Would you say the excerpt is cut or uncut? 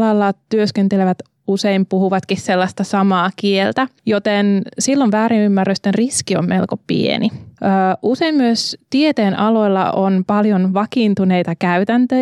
uncut